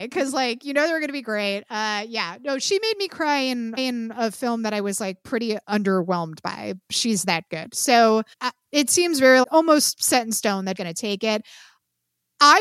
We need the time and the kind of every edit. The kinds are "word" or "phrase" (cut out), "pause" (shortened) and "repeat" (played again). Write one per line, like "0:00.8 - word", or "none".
0:03.8 - repeat
0:05.6 - pause
0:08.3 - pause
0:09.4 - word
0:10.8 - word